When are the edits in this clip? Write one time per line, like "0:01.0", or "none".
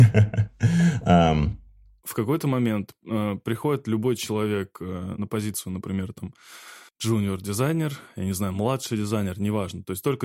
0:06.9